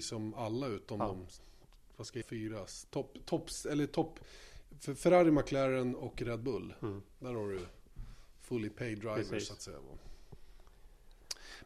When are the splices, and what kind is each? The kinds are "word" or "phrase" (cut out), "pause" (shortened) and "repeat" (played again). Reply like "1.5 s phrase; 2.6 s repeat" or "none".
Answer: 2.2 s word